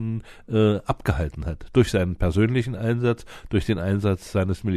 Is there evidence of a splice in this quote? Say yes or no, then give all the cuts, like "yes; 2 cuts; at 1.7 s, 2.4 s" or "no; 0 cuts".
no; 0 cuts